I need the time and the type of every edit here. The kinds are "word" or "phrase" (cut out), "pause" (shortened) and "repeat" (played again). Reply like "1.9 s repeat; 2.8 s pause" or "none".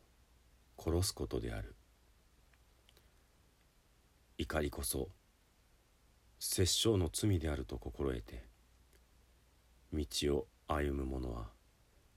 none